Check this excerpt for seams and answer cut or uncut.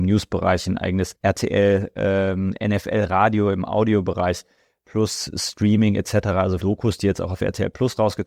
cut